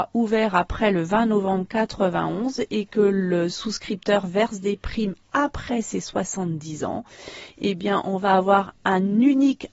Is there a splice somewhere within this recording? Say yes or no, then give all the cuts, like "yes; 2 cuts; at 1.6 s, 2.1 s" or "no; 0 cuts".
no; 0 cuts